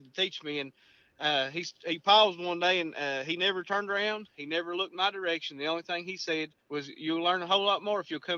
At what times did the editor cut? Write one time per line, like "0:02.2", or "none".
0:06.6

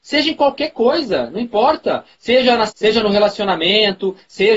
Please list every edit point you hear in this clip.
0:02.7

